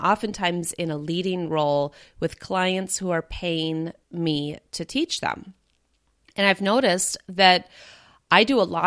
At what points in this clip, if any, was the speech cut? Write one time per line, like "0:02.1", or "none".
0:04.0